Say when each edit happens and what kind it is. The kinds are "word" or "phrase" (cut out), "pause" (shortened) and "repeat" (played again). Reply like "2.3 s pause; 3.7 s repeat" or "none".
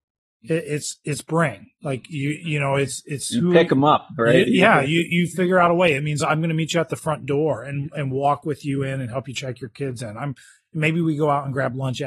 none